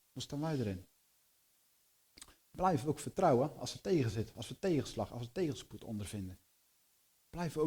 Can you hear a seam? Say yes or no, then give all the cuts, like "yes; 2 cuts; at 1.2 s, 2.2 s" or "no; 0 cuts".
no; 0 cuts